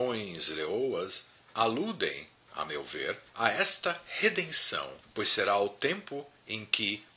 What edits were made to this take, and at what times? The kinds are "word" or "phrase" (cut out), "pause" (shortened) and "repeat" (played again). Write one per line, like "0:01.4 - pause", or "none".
0:03.3 - pause
0:05.0 - pause